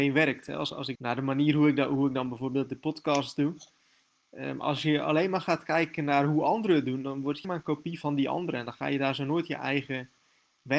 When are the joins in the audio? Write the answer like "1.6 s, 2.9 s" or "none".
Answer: 1.0 s, 7.4 s, 8.0 s